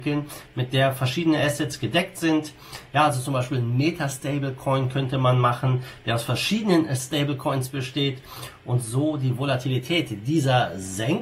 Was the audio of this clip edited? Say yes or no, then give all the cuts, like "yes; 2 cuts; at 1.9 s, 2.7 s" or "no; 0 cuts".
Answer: no; 0 cuts